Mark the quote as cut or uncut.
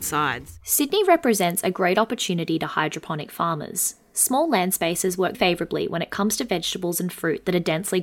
cut